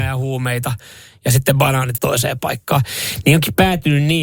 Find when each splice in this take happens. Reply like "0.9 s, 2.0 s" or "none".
2.0 s

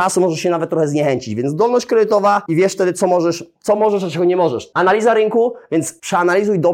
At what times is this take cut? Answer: none

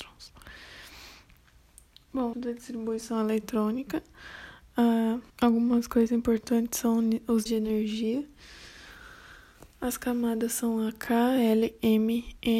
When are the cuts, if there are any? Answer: 2.3 s, 5.3 s, 7.5 s

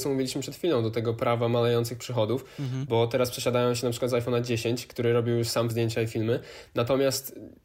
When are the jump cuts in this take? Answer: 5.7 s

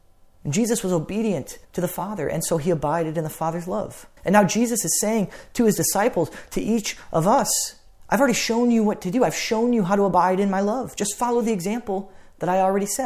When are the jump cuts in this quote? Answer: 1.6 s, 4.2 s

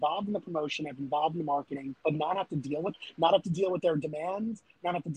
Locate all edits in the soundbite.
2.0 s, 2.9 s

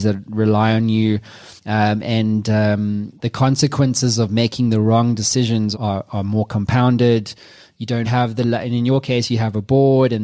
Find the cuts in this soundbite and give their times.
1.6 s, 5.7 s, 8.0 s

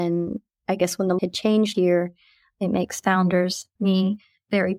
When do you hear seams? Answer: 1.2 s, 1.7 s, 3.8 s

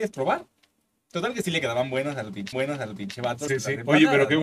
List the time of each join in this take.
2.5 s, 3.5 s

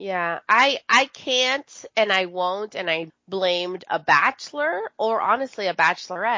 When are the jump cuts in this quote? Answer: 3.1 s

